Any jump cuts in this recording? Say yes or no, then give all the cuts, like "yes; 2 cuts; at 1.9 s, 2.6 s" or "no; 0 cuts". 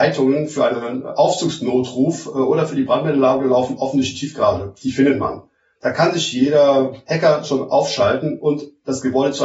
no; 0 cuts